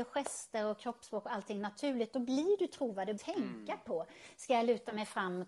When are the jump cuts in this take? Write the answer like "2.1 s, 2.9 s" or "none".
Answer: 3.2 s